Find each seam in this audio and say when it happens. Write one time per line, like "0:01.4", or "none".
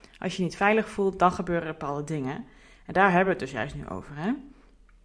none